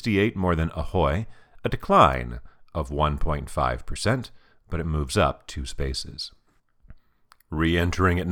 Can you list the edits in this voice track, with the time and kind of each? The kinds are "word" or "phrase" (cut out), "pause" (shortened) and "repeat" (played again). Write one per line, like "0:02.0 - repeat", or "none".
none